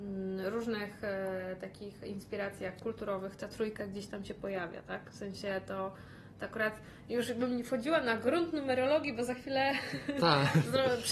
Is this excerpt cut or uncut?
uncut